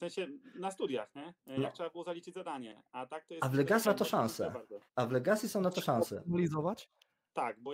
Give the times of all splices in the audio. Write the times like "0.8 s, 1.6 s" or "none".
1.4 s, 3.8 s, 4.9 s

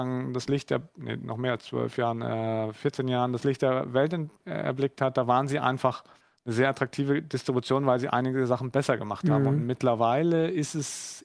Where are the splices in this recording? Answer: 6.2 s

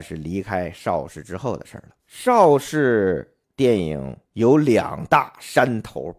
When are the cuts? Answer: 2.0 s, 3.4 s, 4.3 s

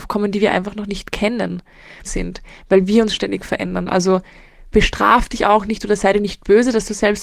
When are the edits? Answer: 2.0 s

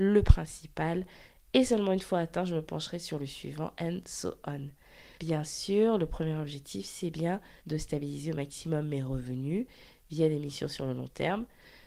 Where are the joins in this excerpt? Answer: 5.2 s, 7.6 s

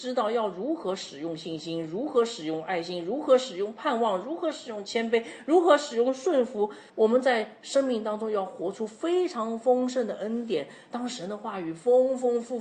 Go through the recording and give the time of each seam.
6.9 s

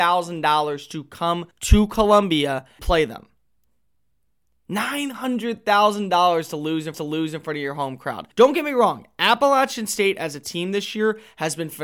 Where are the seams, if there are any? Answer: 1.5 s, 2.8 s, 6.9 s, 8.3 s

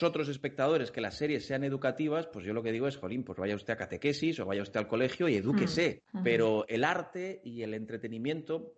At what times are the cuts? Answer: 6.0 s

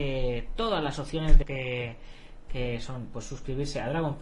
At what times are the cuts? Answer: 1.4 s, 2.5 s

